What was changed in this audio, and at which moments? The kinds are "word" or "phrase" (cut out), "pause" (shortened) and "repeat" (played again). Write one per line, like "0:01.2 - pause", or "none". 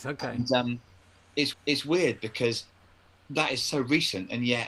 0:01.5 - repeat